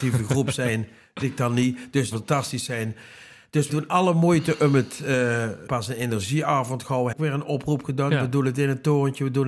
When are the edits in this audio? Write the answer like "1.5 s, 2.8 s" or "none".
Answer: 1.2 s, 2.1 s, 3.7 s, 5.7 s, 7.1 s